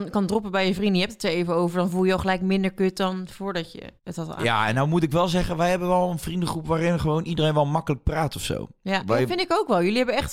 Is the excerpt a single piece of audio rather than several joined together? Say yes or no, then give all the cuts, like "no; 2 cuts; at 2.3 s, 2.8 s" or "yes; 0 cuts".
no; 1 cut; at 4.0 s